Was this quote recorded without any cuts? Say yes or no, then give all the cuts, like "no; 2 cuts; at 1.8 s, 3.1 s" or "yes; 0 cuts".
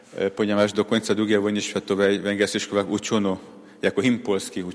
yes; 0 cuts